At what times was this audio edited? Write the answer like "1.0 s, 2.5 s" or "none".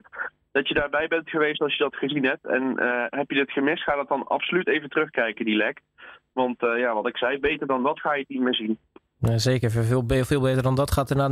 none